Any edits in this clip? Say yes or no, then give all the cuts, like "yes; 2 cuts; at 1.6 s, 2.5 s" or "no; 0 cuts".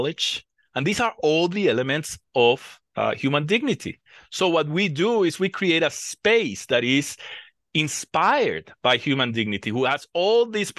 yes; 1 cut; at 2.9 s